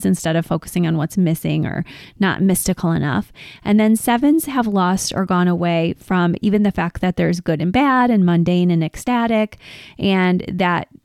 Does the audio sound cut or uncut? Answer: uncut